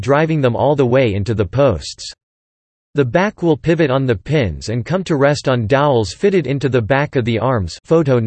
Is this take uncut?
yes; 0 cuts

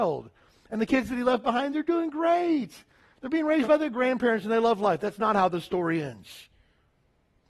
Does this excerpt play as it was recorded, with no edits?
yes; 0 cuts

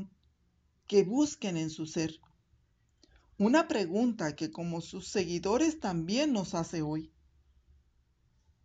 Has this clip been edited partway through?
no; 0 cuts

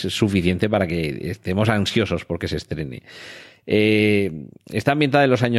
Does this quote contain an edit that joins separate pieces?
no; 0 cuts

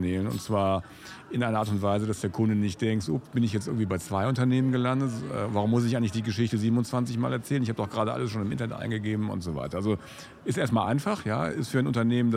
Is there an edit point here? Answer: no; 0 cuts

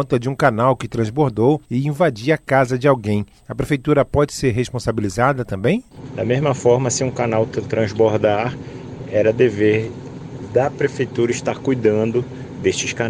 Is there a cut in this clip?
yes; 1 cut; at 1.6 s

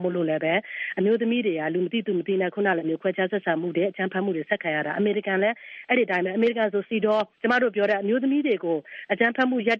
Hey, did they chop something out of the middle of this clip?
yes; 1 cut; at 7.3 s

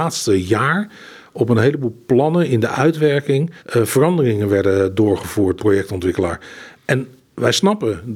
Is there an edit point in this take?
yes; 2 cuts; at 3.6 s, 5.6 s

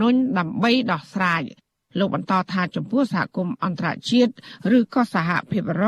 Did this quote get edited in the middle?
no; 0 cuts

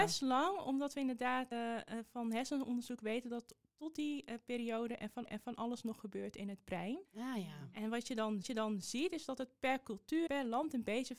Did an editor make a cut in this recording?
yes; 5 cuts; at 1.5 s, 5.3 s, 7.1 s, 8.4 s, 10.3 s

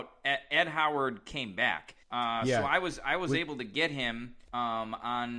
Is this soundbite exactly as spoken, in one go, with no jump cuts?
no; 2 cuts; at 2.0 s, 4.4 s

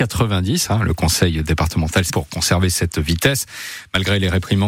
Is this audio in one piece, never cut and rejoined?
no; 1 cut; at 2.1 s

